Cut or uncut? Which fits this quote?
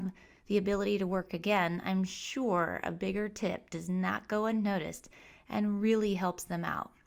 uncut